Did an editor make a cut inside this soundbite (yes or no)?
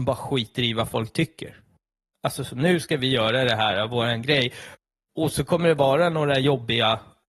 no